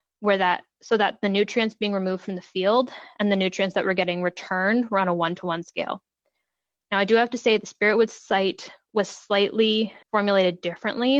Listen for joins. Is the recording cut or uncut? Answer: cut